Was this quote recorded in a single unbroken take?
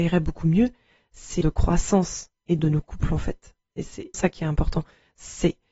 no; 3 cuts; at 1.4 s, 2.6 s, 4.1 s

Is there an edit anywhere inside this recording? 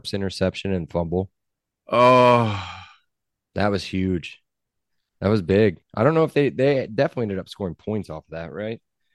no; 0 cuts

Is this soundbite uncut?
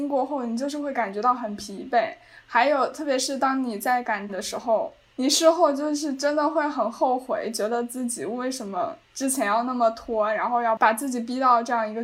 no; 2 cuts; at 4.3 s, 9.0 s

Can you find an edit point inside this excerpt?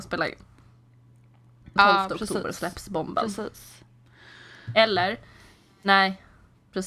yes; 1 cut; at 1.8 s

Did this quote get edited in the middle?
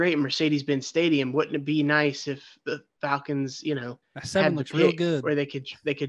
yes; 1 cut; at 4.0 s

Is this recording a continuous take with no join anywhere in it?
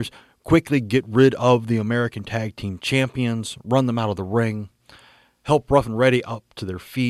yes; 0 cuts

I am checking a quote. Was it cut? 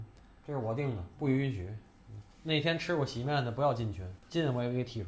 yes; 2 cuts; at 2.3 s, 4.2 s

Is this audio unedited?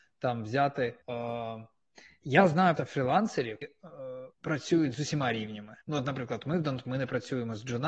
no; 6 cuts; at 1.0 s, 2.8 s, 3.6 s, 4.3 s, 5.8 s, 6.8 s

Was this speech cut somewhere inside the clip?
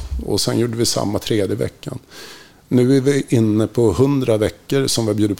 no; 0 cuts

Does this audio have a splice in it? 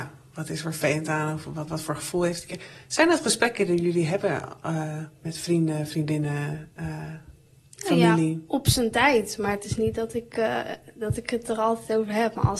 yes; 1 cut; at 1.7 s

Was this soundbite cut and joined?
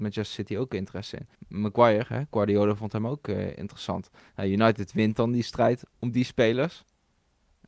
yes; 2 cuts; at 1.3 s, 5.9 s

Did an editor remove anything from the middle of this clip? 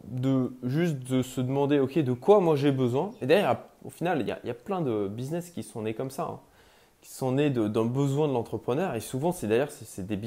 no; 0 cuts

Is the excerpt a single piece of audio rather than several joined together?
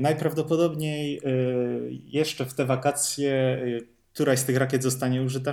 yes; 0 cuts

